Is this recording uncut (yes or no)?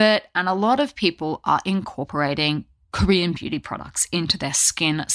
yes